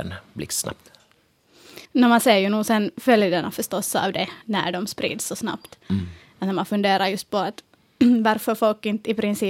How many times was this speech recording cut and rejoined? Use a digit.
2